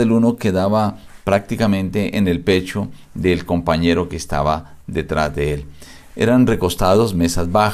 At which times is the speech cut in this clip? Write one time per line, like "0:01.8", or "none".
none

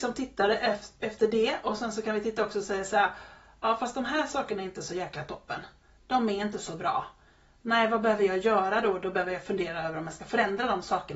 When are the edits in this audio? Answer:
none

